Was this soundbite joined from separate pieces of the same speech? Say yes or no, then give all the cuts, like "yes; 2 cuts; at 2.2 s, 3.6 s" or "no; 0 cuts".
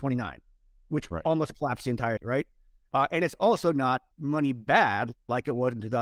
yes; 2 cuts; at 2.2 s, 4.1 s